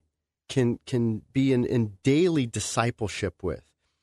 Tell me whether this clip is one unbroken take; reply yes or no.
no